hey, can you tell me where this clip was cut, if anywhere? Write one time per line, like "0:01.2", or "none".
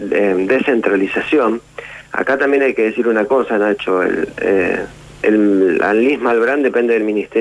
0:02.1